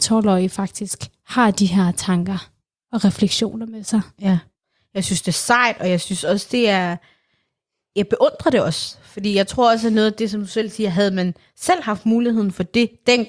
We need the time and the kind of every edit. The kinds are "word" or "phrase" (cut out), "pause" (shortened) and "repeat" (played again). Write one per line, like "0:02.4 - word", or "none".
none

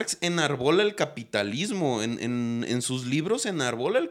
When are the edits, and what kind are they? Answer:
none

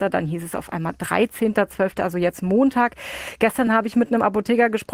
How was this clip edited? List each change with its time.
none

